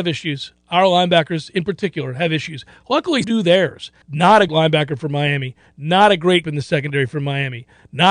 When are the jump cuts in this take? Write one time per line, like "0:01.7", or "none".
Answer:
0:03.2
0:04.0
0:04.5
0:06.4